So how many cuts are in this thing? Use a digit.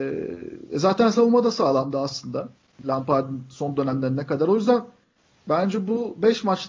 1